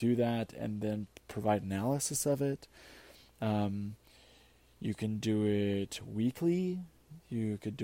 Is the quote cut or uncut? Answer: uncut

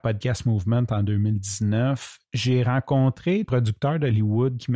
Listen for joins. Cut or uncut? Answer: cut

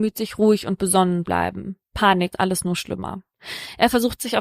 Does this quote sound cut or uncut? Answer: cut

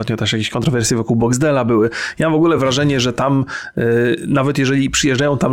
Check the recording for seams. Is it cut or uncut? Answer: uncut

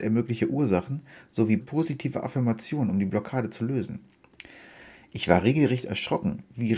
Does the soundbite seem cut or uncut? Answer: cut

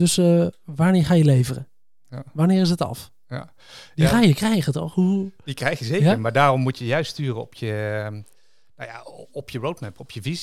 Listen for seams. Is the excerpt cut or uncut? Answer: uncut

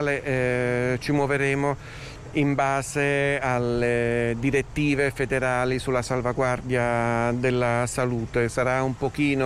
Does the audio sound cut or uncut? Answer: uncut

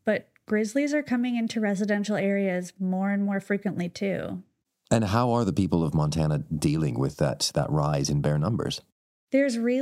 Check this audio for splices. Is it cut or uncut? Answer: cut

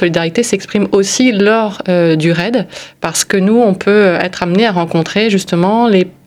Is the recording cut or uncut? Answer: uncut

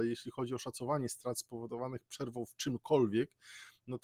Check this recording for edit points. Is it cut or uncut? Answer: uncut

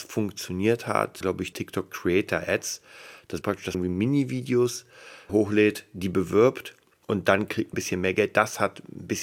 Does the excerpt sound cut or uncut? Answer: cut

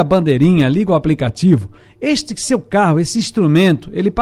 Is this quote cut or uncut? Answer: uncut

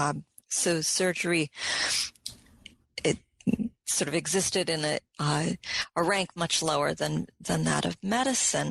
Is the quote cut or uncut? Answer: uncut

